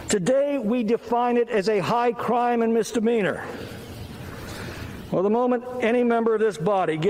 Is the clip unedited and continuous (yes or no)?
yes